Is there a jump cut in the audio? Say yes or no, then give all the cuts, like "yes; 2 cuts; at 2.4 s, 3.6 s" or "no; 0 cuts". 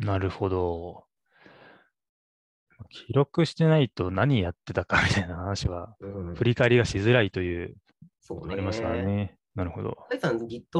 yes; 1 cut; at 8.1 s